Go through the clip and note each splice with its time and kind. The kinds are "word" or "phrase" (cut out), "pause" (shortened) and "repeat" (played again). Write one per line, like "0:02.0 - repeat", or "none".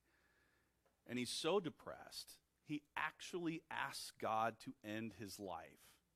none